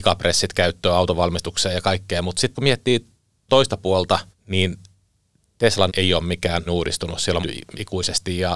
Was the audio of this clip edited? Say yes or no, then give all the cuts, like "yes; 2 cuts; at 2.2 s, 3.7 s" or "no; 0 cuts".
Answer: yes; 6 cuts; at 2.5 s, 3.5 s, 4.3 s, 5.9 s, 6.7 s, 7.4 s